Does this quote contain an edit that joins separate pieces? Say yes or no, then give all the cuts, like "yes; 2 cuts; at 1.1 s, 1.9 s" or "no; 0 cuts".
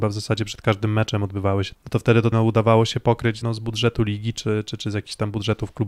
yes; 3 cuts; at 1.7 s, 2.3 s, 3.4 s